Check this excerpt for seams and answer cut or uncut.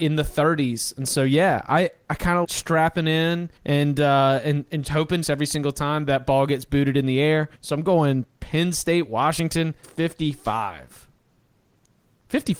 cut